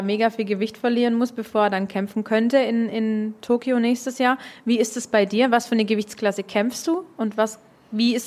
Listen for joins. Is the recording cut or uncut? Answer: uncut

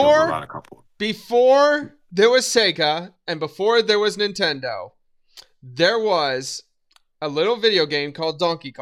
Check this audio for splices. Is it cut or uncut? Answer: uncut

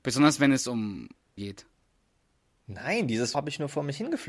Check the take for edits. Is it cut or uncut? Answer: cut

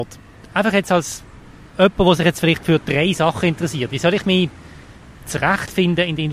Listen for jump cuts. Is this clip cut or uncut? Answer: uncut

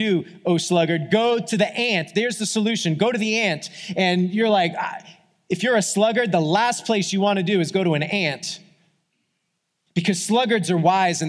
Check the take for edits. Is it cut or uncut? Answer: uncut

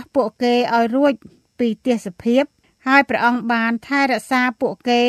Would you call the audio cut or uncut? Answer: uncut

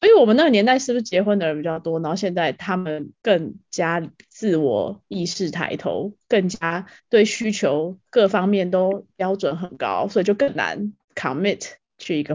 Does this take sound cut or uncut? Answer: cut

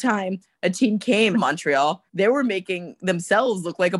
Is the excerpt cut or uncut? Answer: cut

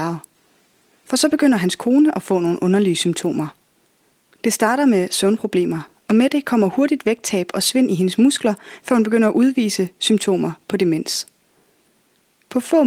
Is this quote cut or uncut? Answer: uncut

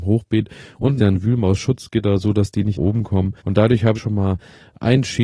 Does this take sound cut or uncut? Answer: cut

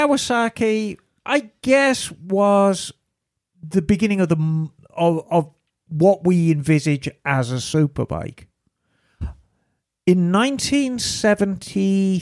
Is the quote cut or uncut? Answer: uncut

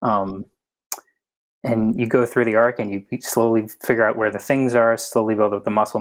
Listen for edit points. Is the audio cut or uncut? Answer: uncut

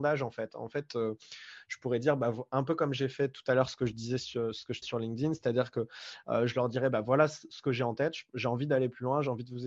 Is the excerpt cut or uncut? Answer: cut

